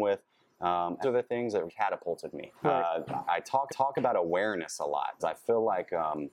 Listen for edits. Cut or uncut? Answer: cut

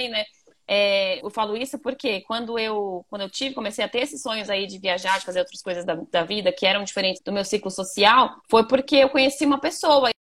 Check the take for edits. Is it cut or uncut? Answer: cut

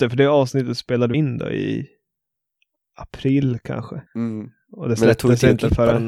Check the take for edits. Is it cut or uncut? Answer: cut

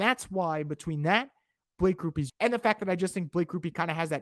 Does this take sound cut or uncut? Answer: cut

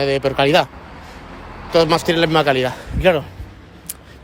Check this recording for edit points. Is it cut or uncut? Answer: cut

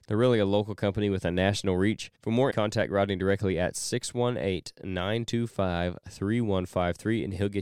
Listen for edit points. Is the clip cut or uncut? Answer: cut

